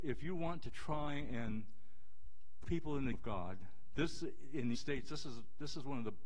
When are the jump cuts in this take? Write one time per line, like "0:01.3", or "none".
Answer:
0:02.6
0:03.1
0:04.7